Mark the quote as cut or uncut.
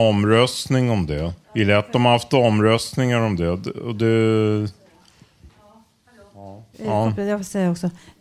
cut